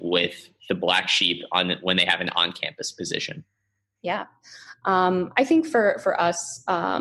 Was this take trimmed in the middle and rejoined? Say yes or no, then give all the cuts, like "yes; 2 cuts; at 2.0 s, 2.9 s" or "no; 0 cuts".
no; 0 cuts